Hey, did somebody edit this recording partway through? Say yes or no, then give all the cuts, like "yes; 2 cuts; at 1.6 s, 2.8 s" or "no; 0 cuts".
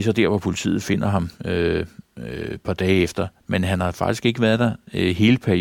no; 0 cuts